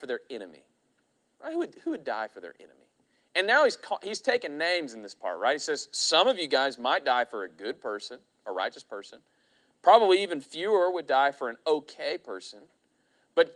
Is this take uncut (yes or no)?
yes